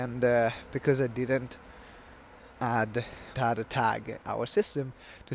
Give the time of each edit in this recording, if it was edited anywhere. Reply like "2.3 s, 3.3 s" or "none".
3.3 s, 4.2 s